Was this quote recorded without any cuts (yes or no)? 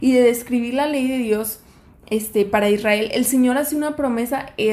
yes